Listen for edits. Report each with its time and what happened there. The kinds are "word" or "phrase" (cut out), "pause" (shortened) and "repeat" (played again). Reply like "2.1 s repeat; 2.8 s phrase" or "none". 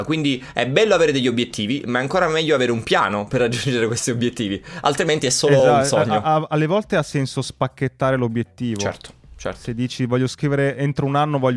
none